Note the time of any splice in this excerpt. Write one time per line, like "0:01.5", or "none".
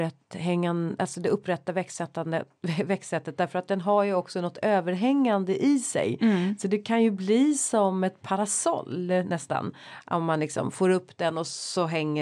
none